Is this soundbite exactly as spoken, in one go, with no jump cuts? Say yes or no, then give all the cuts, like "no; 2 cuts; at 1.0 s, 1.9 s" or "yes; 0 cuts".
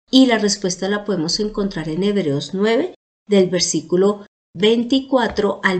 yes; 0 cuts